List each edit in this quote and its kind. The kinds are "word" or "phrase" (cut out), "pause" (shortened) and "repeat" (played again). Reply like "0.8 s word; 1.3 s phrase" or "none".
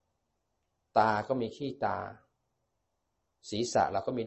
none